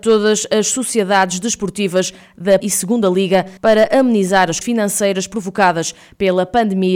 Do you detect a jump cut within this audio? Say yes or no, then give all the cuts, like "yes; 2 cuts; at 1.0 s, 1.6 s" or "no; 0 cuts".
yes; 3 cuts; at 2.6 s, 3.6 s, 4.6 s